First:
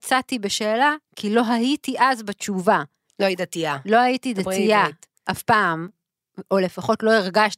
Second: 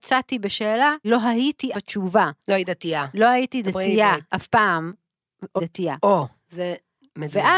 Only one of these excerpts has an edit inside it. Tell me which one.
second; 5 cuts; at 1.0 s, 1.7 s, 2.4 s, 4.3 s, 5.6 s

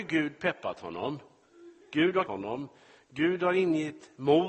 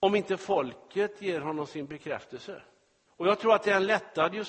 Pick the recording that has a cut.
first; 2 cuts; at 1.8 s, 2.3 s

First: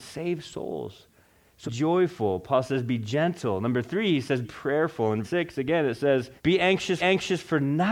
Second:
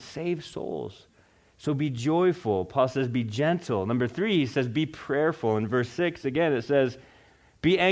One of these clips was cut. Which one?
first; 5 cuts; at 1.7 s, 4.4 s, 5.2 s, 6.4 s, 7.0 s

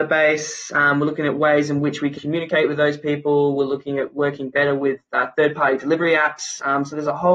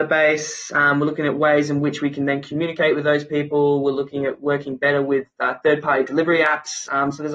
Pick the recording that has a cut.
first; 1 cut; at 2.2 s

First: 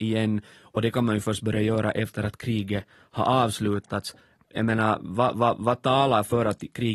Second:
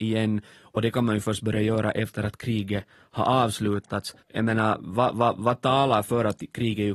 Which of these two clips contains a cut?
second; 1 cut; at 4.2 s

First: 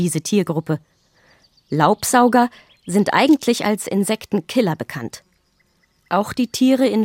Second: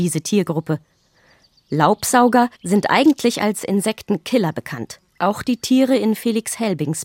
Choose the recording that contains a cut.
second; 2 cuts; at 2.5 s, 5.1 s

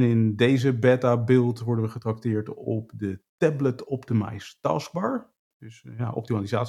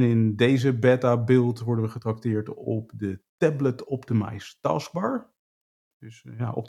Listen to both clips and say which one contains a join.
first; 1 cut; at 5.5 s

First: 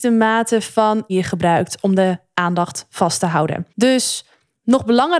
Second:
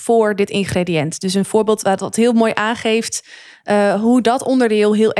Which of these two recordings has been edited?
first; 2 cuts; at 1.1 s, 3.7 s

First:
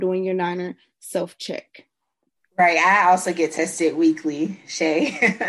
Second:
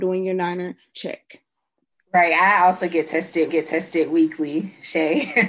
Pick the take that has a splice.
second; 2 cuts; at 0.9 s, 3.5 s

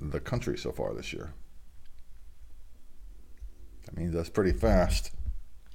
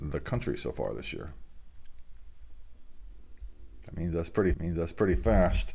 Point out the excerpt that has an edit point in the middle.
second; 1 cut; at 4.5 s

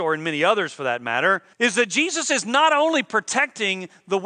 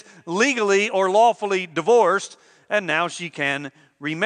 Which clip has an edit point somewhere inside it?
first; 1 cut; at 1.5 s

